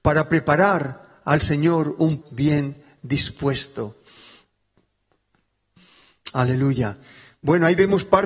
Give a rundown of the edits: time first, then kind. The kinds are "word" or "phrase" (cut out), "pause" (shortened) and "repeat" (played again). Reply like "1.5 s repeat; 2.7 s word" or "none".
2.2 s word